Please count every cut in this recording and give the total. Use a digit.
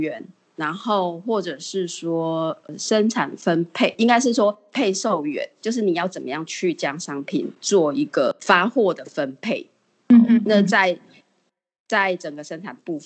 1